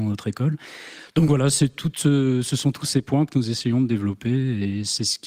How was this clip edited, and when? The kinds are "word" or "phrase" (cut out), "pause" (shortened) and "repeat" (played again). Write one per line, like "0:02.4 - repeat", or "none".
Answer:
none